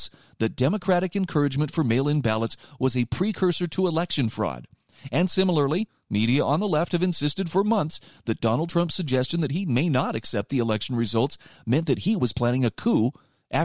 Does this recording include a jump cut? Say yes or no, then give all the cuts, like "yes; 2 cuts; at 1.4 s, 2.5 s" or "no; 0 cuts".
no; 0 cuts